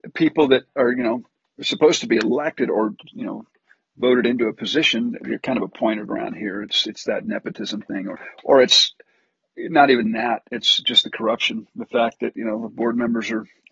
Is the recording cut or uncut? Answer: uncut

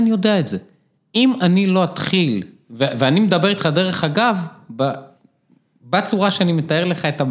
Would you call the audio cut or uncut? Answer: uncut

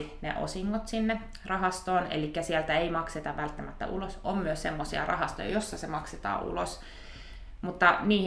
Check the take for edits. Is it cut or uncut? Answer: uncut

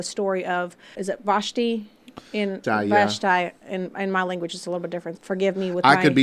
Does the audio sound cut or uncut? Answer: cut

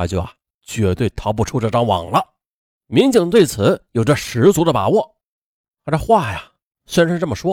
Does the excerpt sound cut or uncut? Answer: uncut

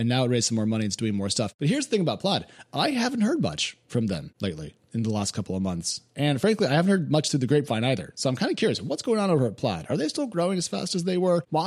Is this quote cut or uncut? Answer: uncut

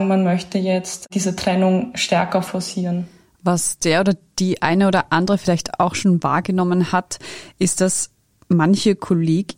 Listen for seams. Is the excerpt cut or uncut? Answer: uncut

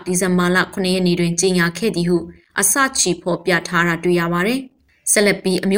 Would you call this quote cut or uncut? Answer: uncut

